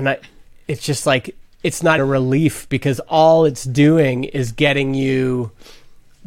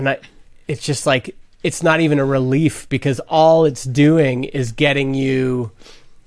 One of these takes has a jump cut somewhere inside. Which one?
first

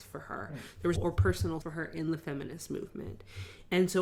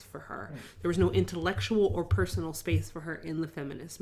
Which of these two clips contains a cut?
first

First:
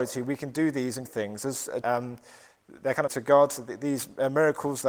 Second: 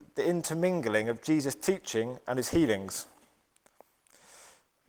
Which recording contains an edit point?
first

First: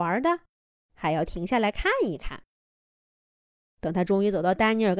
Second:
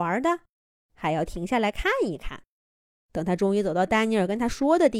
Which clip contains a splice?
second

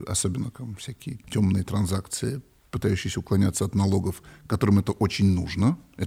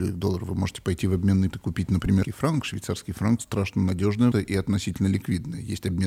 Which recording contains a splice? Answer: second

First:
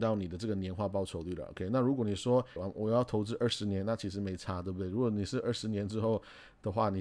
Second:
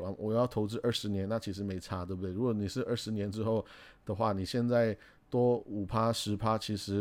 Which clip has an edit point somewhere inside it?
first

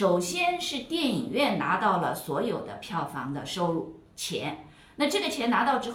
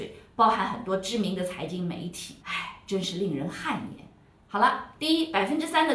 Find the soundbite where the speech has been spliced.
second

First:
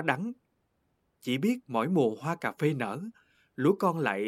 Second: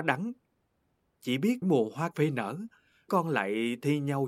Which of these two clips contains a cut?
second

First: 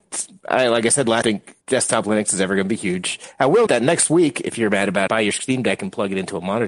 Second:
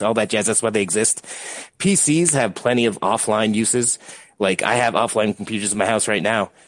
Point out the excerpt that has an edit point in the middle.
first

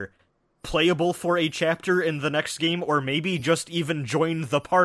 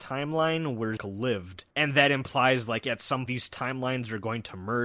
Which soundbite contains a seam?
second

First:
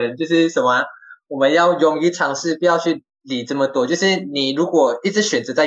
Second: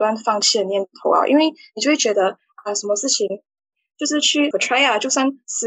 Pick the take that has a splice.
second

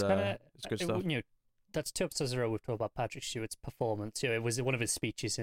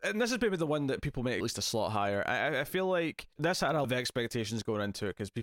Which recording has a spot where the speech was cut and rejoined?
second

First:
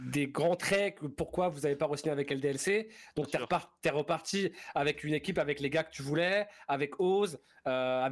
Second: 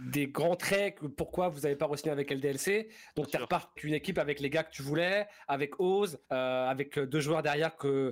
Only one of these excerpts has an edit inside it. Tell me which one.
second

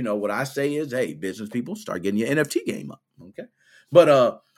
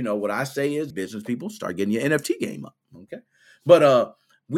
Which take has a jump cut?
second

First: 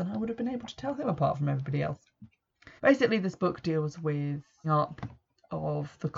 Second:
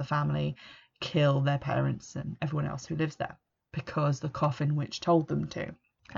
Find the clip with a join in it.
first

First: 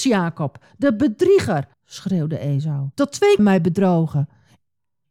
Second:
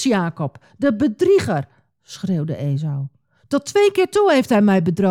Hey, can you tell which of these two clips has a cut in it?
first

